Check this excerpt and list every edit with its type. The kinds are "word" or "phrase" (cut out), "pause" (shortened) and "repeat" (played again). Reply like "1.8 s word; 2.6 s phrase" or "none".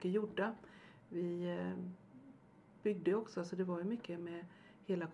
none